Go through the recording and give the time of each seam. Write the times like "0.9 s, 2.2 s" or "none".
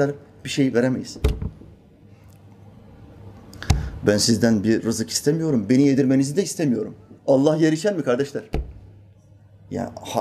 7.2 s